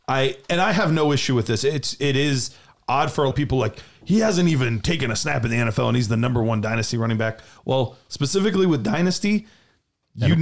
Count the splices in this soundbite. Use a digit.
1